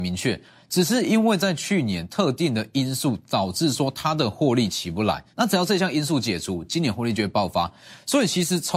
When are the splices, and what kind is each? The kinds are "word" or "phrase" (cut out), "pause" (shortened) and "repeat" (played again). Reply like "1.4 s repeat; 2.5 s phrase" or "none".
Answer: 5.3 s pause